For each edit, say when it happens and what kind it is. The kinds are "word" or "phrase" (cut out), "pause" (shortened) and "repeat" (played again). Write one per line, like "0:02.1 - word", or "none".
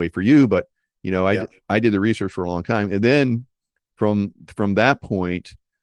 none